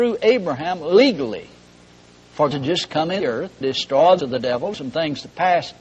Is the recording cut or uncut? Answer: cut